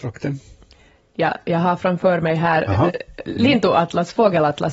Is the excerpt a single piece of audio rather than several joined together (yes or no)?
yes